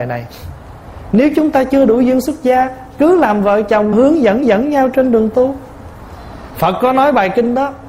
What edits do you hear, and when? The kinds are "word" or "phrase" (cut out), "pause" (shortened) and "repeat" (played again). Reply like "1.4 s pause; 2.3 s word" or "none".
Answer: 3.9 s phrase; 4.4 s repeat